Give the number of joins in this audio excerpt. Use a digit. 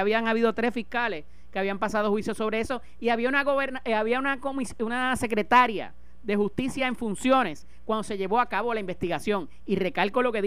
0